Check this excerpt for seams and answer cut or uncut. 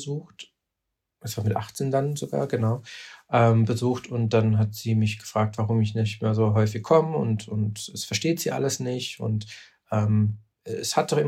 uncut